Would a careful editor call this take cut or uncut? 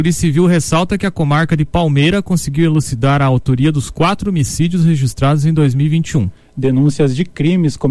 uncut